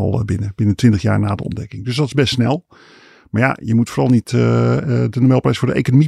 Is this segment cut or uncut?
uncut